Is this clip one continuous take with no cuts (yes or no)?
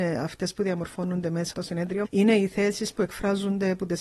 no